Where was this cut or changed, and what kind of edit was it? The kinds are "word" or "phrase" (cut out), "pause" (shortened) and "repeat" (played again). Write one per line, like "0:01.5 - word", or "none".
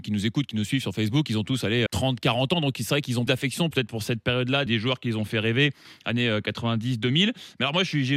0:01.9 - word
0:03.3 - word
0:03.7 - word
0:04.7 - word